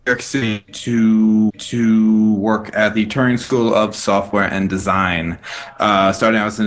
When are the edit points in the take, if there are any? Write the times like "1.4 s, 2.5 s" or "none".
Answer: 1.5 s

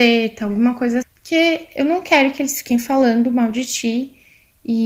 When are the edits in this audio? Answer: 1.0 s

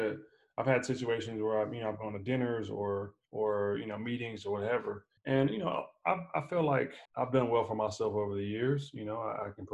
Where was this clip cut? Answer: 3.2 s, 5.2 s, 7.1 s

